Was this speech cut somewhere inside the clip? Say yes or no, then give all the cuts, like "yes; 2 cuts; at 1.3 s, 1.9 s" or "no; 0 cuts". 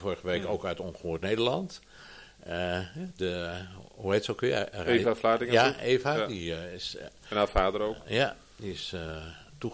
no; 0 cuts